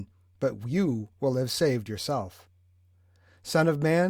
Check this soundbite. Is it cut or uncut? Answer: uncut